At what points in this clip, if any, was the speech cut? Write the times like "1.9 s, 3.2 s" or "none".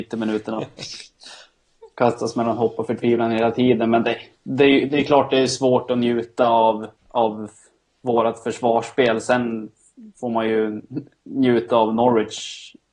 7.0 s